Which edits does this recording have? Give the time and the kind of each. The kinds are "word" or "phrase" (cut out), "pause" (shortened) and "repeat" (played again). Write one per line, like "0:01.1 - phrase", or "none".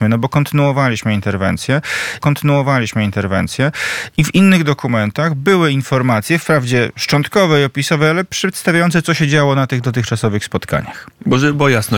0:02.2 - repeat